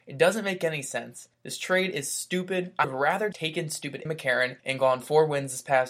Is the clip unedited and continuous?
no; 5 cuts; at 1.3 s, 2.8 s, 3.3 s, 4.1 s, 4.6 s

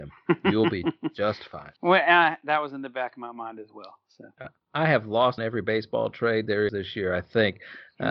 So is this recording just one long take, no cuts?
no; 3 cuts; at 1.8 s, 5.4 s, 6.7 s

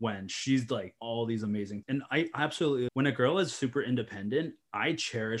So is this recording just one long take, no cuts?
no; 3 cuts; at 1.0 s, 1.8 s, 2.9 s

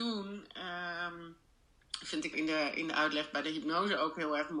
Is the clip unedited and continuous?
no; 1 cut; at 2.3 s

